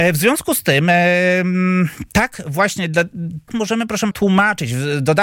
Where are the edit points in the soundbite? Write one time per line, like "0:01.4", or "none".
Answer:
0:03.5
0:04.1

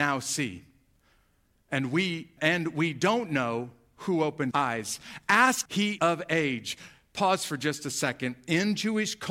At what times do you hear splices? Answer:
0:02.4
0:04.5
0:05.7
0:06.0

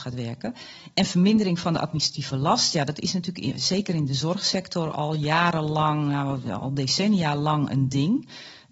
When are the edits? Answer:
none

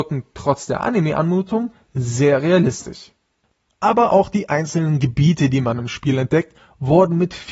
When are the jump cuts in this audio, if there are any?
none

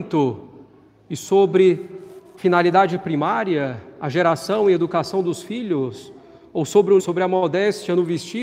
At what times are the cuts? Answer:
0:02.4
0:07.0

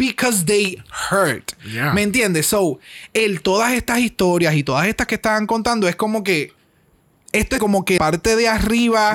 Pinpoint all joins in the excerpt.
0:05.1
0:07.6
0:08.0

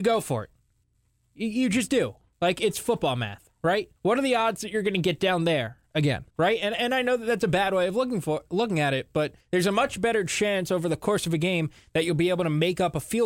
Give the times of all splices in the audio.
0:04.0
0:06.3
0:09.4

